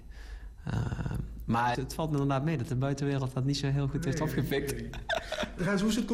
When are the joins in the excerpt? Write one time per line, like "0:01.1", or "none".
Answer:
0:01.7